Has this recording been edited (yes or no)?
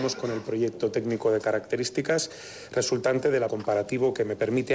yes